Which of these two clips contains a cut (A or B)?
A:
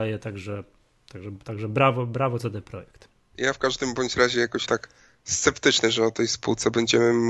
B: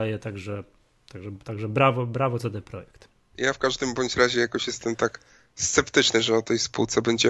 A